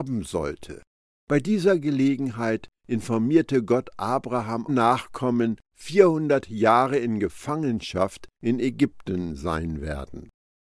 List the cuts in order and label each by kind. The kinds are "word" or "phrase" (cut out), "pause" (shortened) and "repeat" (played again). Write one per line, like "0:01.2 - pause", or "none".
0:04.7 - phrase